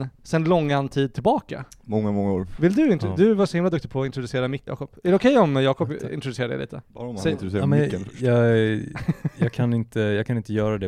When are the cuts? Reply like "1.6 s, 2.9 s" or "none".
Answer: 1.7 s, 4.7 s, 6.9 s